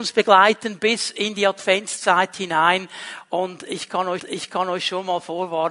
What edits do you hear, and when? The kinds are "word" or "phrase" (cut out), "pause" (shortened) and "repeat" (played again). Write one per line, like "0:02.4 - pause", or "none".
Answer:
0:04.2 - repeat